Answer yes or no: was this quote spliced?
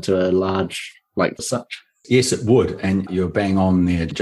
yes